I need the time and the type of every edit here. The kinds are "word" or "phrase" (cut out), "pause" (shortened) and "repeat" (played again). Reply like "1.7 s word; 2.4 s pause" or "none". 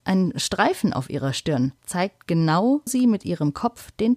1.8 s pause; 2.9 s word